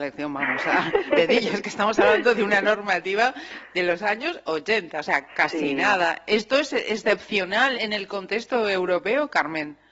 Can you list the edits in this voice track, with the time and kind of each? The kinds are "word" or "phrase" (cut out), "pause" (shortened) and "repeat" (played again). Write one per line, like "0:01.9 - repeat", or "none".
0:01.1 - word
0:07.7 - word